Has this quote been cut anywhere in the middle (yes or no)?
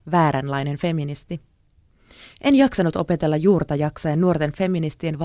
no